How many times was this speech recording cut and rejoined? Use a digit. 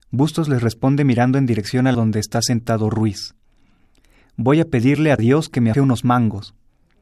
3